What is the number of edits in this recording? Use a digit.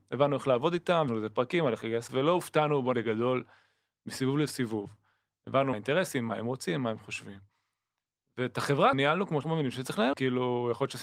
7